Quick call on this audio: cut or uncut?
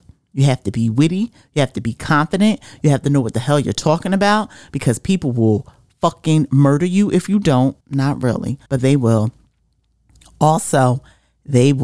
cut